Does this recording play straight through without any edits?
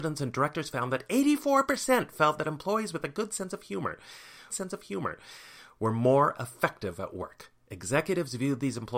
no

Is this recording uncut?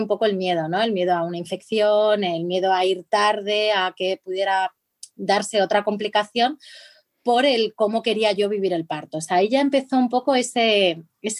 yes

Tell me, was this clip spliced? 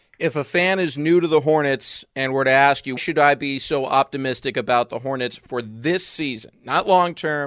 yes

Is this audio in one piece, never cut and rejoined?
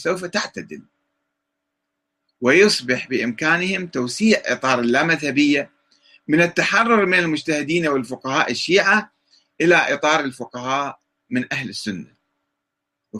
yes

